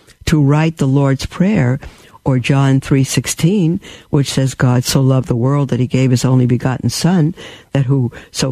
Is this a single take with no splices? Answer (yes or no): yes